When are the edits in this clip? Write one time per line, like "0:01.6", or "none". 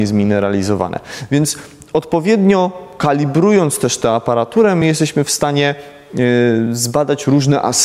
none